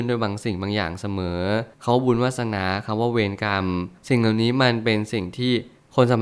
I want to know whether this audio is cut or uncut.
cut